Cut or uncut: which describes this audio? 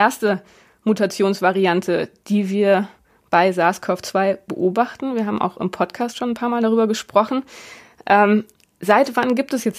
uncut